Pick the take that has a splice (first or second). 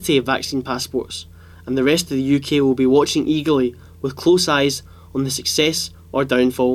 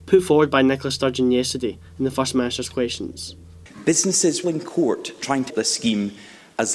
second